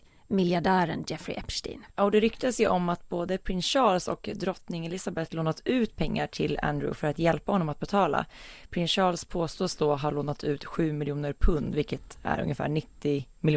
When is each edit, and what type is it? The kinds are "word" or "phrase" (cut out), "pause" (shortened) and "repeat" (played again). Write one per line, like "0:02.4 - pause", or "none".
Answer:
0:01.9 - pause